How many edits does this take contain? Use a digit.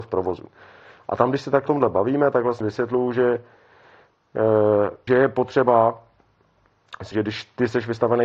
4